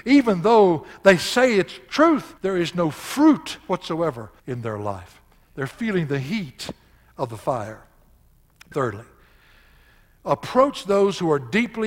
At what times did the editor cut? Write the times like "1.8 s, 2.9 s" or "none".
2.4 s, 4.4 s, 8.7 s